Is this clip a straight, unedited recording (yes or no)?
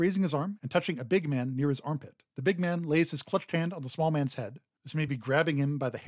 yes